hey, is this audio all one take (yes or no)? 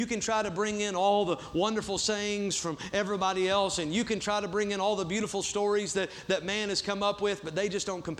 yes